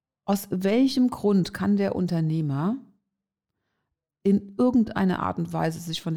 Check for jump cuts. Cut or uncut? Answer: uncut